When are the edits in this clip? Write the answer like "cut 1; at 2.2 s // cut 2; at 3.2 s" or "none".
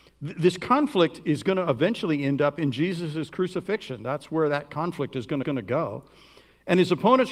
cut 1; at 5.4 s